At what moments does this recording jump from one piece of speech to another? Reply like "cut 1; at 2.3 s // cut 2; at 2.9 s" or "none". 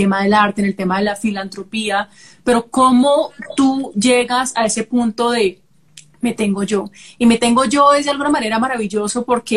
none

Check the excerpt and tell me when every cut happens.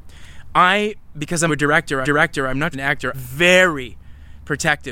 cut 1; at 1.5 s // cut 2; at 2.0 s // cut 3; at 2.7 s // cut 4; at 3.1 s

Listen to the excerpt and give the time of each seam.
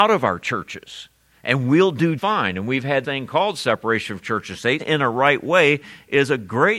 cut 1; at 2.2 s // cut 2; at 3.0 s // cut 3; at 4.8 s

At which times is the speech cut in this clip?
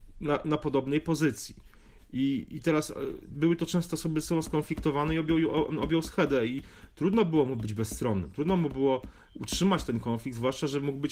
none

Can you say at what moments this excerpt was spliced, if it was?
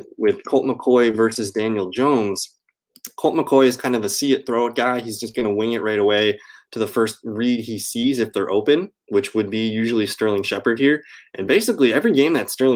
none

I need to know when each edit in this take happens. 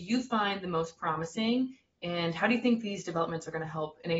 none

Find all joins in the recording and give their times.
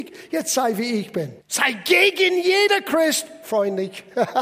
cut 1; at 1.4 s

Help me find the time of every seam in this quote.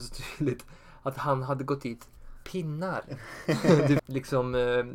cut 1; at 2.4 s // cut 2; at 4.0 s

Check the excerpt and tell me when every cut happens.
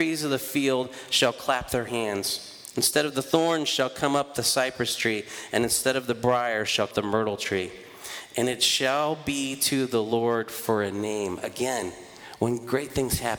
cut 1; at 6.9 s

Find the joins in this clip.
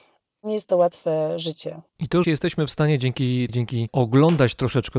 cut 1; at 1.9 s // cut 2; at 2.2 s // cut 3; at 3.5 s // cut 4; at 3.9 s

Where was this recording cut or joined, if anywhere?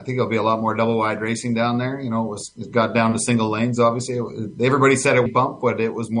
cut 1; at 5.3 s

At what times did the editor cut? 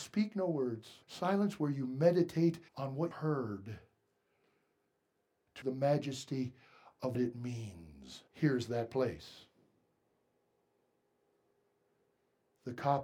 cut 1; at 1.0 s // cut 2; at 2.7 s // cut 3; at 3.1 s // cut 4; at 5.6 s // cut 5; at 7.1 s // cut 6; at 8.3 s

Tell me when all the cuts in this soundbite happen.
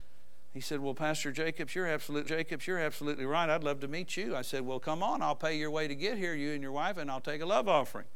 cut 1; at 2.2 s

